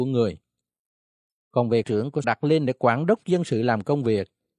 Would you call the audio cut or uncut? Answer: cut